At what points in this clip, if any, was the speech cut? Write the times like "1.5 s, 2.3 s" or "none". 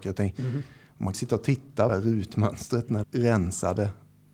1.1 s, 1.9 s, 3.0 s